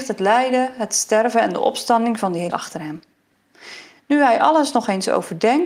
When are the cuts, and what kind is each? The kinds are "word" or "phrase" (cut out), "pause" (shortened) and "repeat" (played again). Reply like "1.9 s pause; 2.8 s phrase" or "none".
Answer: 2.5 s word